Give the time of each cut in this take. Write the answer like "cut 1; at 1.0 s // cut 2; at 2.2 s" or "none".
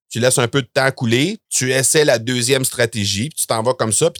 cut 1; at 1.5 s